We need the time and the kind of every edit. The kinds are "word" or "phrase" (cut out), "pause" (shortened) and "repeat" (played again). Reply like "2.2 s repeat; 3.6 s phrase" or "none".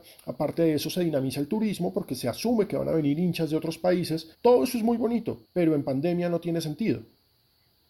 4.3 s pause; 5.4 s pause